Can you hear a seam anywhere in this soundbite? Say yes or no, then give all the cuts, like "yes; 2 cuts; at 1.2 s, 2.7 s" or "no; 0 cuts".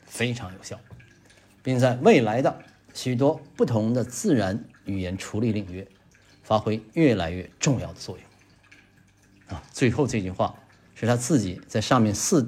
no; 0 cuts